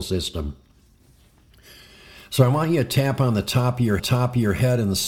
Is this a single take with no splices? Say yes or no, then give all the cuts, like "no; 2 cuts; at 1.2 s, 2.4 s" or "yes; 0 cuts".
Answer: no; 1 cut; at 4.0 s